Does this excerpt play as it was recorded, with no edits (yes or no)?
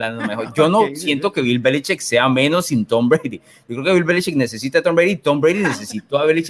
yes